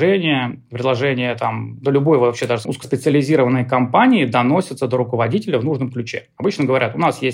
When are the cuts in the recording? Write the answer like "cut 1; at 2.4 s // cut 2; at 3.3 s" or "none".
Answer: cut 1; at 2.6 s